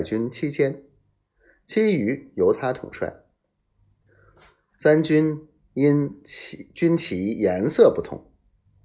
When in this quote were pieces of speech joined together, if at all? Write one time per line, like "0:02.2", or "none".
none

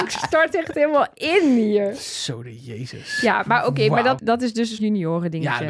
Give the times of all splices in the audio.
0:04.2
0:04.8

